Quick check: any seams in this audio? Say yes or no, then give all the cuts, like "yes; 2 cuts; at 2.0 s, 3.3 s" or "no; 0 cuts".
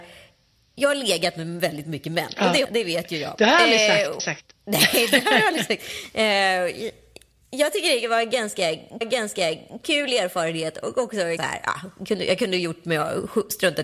yes; 4 cuts; at 2.6 s, 4.2 s, 9.0 s, 11.4 s